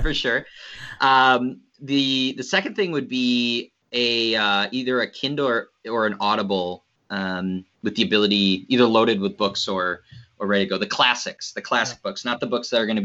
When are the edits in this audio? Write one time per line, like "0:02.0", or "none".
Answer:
0:07.7

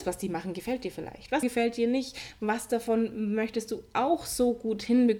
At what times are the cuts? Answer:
0:01.4

